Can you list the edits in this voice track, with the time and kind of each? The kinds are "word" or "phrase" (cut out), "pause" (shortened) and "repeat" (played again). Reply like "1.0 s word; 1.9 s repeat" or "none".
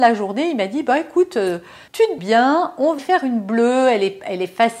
1.9 s pause; 2.2 s word; 3.0 s word